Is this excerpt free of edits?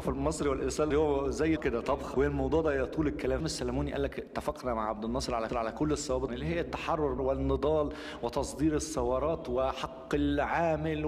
no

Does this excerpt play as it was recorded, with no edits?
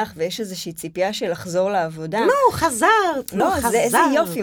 no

